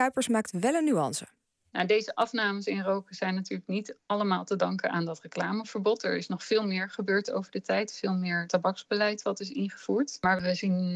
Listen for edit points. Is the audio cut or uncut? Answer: uncut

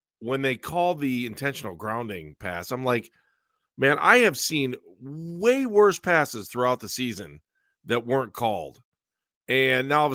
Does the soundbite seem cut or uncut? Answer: uncut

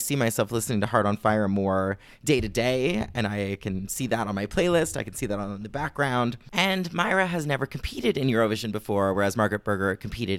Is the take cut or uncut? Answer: uncut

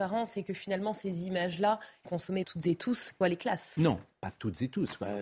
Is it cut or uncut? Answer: cut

